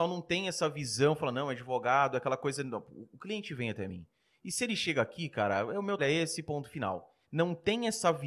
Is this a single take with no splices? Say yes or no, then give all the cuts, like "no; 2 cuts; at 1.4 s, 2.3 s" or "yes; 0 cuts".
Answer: no; 2 cuts; at 6.0 s, 7.2 s